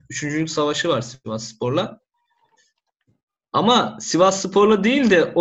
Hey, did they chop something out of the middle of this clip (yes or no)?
no